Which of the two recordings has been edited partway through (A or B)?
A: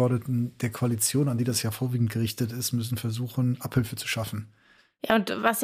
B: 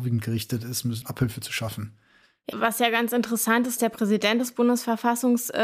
B